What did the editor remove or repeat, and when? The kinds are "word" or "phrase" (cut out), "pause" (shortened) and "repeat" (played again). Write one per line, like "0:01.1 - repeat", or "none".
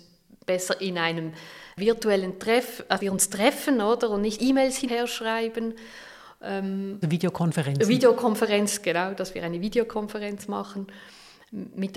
0:03.0 - word
0:04.4 - word
0:04.9 - word
0:07.0 - word